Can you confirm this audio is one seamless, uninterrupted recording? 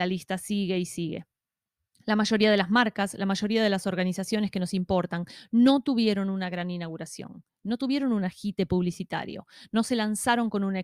yes; 0 cuts

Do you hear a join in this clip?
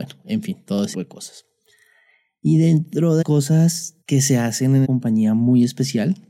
yes; 4 cuts; at 0.9 s, 3.2 s, 4.0 s, 4.8 s

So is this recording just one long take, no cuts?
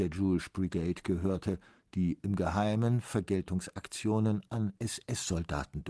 yes; 0 cuts

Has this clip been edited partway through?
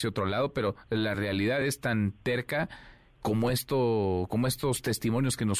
no; 0 cuts

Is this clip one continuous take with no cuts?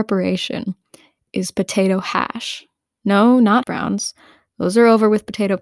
no; 1 cut; at 3.6 s

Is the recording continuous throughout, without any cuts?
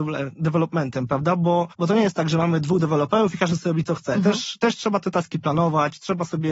no; 1 cut; at 1.7 s

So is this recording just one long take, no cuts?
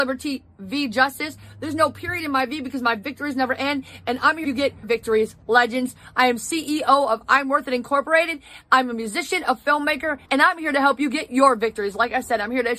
no; 3 cuts; at 4.4 s, 4.8 s, 10.2 s

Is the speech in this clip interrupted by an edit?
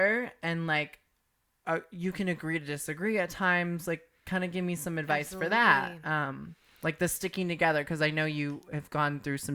no; 0 cuts

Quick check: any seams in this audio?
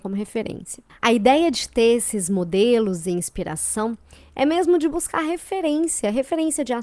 no; 0 cuts

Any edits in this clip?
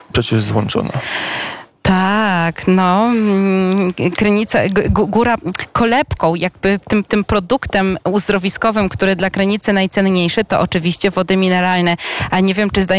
no; 0 cuts

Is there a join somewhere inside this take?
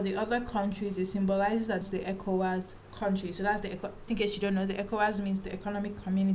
yes; 3 cuts; at 1.8 s, 2.8 s, 4.1 s

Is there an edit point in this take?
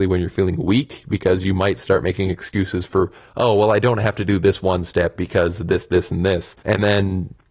yes; 1 cut; at 6.6 s

